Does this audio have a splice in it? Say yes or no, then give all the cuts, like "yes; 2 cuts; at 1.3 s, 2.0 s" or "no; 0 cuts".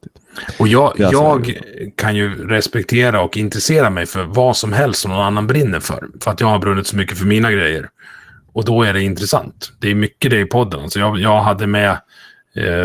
no; 0 cuts